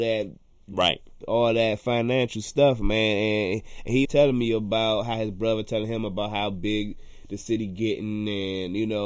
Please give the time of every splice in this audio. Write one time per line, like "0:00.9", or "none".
0:04.0